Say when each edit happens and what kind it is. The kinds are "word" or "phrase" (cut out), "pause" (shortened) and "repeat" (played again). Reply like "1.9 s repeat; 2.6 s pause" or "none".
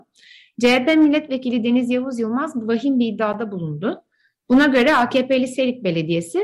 none